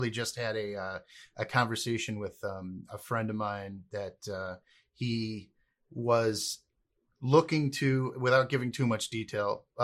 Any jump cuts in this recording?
no; 0 cuts

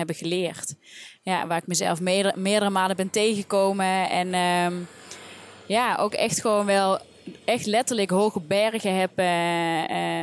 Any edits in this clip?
no; 0 cuts

